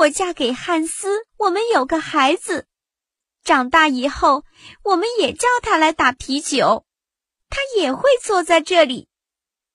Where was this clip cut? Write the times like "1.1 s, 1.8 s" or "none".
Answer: 1.3 s